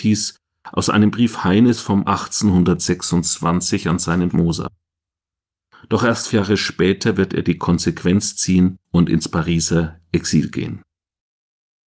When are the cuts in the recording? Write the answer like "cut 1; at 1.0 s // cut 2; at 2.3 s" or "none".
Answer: cut 1; at 2.1 s // cut 2; at 4.3 s // cut 3; at 6.3 s // cut 4; at 8.8 s